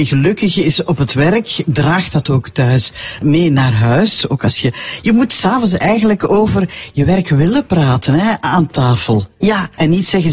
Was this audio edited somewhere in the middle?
yes; 1 cut; at 3.2 s

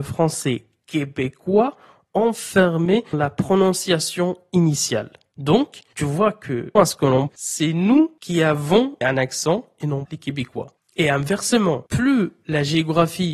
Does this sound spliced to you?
yes; 5 cuts; at 3.1 s, 6.8 s, 7.3 s, 9.0 s, 10.0 s

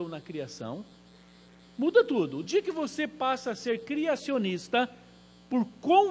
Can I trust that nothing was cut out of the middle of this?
yes; 0 cuts

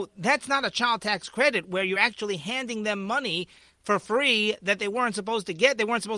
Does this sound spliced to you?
no; 0 cuts

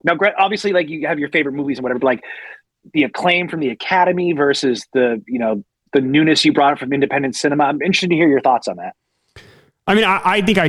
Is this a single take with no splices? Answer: yes; 0 cuts

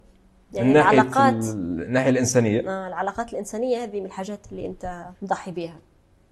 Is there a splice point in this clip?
yes; 1 cut; at 5.1 s

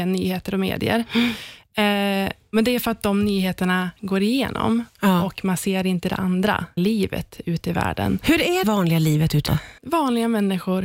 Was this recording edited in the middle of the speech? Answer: yes; 4 cuts; at 6.8 s, 8.6 s, 9.5 s, 9.8 s

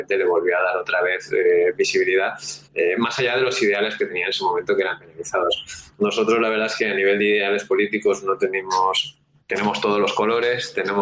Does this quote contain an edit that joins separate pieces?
yes; 3 cuts; at 2.6 s, 4.0 s, 9.4 s

